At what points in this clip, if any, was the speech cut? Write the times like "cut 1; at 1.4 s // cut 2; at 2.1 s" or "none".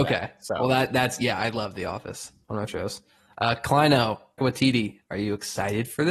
cut 1; at 2.7 s // cut 2; at 4.4 s